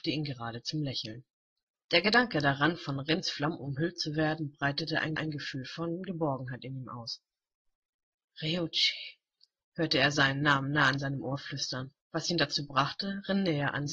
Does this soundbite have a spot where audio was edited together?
yes; 4 cuts; at 1.6 s, 5.2 s, 9.4 s, 12.0 s

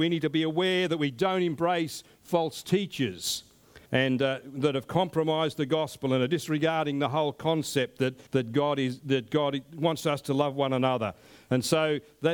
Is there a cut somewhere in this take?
yes; 2 cuts; at 3.9 s, 8.3 s

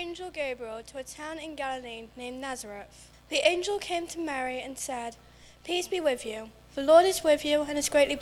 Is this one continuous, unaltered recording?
no; 1 cut; at 3.1 s

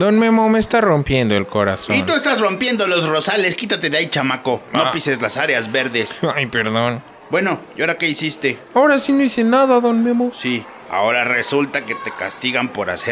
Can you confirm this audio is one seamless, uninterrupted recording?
yes; 0 cuts

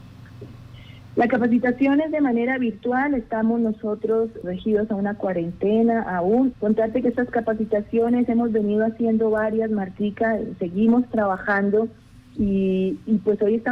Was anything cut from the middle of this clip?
yes; 2 cuts; at 4.4 s, 6.5 s

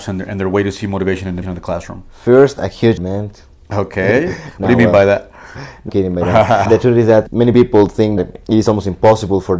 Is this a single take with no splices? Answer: no; 6 cuts; at 1.4 s, 3.0 s, 5.9 s, 6.7 s, 7.3 s, 8.2 s

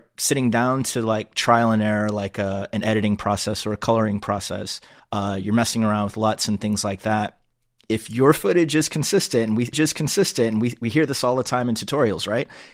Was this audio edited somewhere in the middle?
yes; 2 cuts; at 5.0 s, 9.7 s

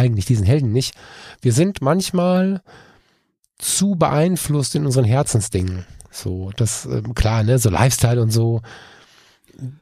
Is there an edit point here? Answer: no; 0 cuts

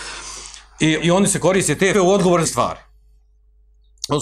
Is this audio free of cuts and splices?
no; 3 cuts; at 1.0 s, 1.9 s, 2.4 s

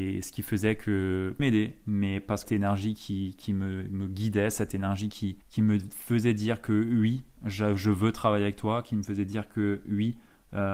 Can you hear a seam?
yes; 3 cuts; at 1.4 s, 2.4 s, 5.4 s

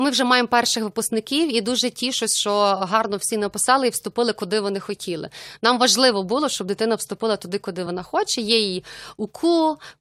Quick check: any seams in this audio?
no; 0 cuts

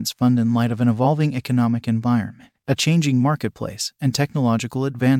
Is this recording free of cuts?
yes; 0 cuts

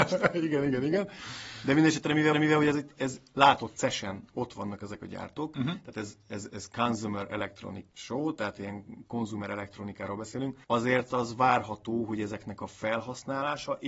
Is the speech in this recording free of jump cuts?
no; 3 cuts; at 2.3 s, 7.9 s, 10.6 s

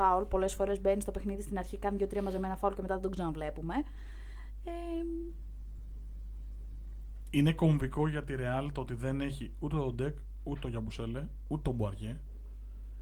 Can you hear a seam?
no; 0 cuts

